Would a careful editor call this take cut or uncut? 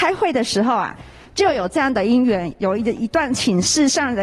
uncut